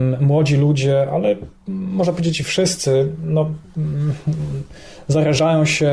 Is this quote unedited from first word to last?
yes; 0 cuts

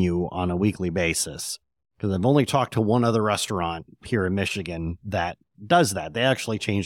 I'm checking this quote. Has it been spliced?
no; 0 cuts

